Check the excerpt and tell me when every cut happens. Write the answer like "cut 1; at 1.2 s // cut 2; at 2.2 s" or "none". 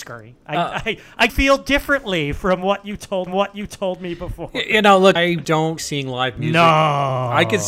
cut 1; at 1.3 s // cut 2; at 3.3 s // cut 3; at 5.2 s // cut 4; at 5.8 s